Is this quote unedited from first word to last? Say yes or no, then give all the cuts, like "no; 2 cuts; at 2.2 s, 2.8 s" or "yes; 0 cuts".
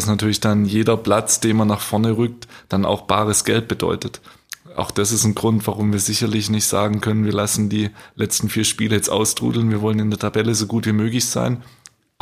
yes; 0 cuts